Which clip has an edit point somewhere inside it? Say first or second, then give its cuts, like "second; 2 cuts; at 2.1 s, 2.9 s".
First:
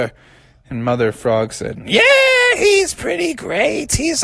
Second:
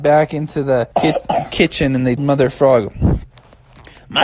second; 2 cuts; at 0.9 s, 2.2 s